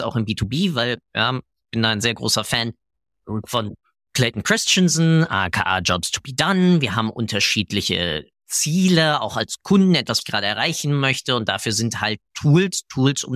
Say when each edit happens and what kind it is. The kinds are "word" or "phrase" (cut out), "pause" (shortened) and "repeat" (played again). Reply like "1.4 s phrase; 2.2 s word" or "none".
10.2 s word